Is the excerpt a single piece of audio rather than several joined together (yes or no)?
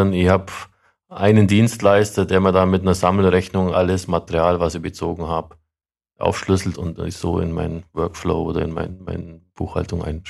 no